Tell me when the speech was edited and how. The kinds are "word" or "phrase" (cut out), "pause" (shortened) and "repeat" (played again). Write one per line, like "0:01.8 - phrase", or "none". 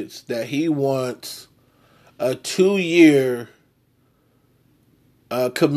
none